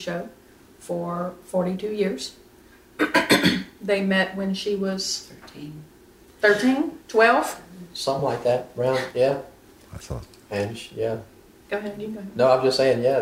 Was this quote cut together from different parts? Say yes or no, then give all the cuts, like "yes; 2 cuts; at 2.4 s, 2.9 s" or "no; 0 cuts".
no; 0 cuts